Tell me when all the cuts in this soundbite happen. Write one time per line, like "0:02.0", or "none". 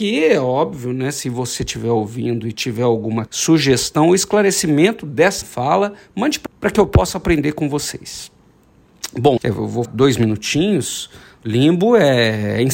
0:03.3
0:05.4
0:06.5
0:09.4
0:09.9